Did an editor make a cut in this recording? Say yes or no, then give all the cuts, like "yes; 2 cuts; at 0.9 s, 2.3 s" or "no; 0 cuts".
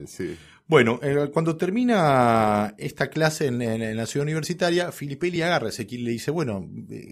no; 0 cuts